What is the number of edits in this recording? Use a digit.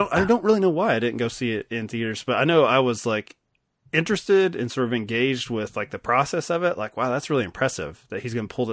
0